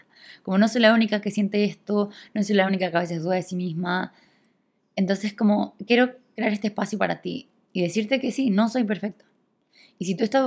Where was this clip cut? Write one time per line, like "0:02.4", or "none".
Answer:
none